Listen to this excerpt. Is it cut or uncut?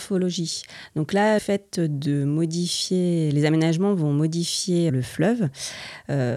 cut